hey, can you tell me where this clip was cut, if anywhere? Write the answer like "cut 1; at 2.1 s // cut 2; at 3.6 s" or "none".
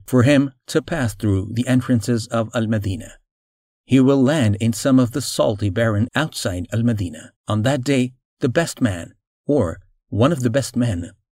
cut 1; at 6.1 s // cut 2; at 7.4 s